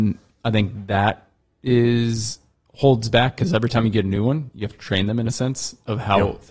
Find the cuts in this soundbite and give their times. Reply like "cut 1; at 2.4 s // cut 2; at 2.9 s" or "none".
none